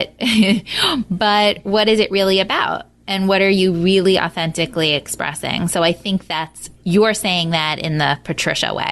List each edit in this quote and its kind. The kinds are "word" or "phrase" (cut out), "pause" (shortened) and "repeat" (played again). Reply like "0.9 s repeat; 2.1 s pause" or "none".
6.8 s pause